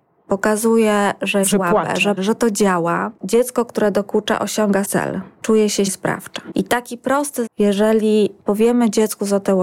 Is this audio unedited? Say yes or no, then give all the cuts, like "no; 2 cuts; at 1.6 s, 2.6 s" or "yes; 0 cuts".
no; 6 cuts; at 1.4 s, 2.2 s, 3.2 s, 4.8 s, 5.9 s, 7.5 s